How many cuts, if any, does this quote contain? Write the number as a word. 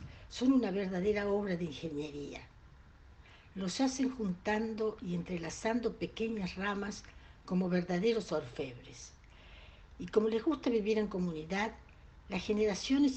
zero